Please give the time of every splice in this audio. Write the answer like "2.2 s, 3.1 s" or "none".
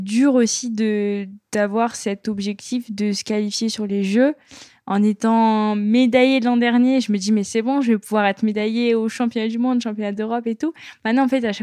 none